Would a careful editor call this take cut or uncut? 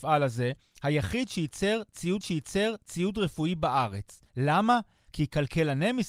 cut